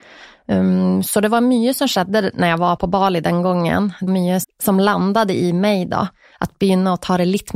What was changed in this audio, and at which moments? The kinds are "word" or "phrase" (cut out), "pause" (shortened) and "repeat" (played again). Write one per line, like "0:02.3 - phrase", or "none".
0:02.8 - word
0:04.1 - word
0:04.4 - word